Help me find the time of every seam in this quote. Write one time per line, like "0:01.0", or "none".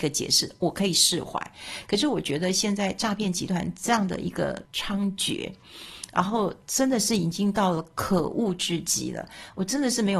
0:04.6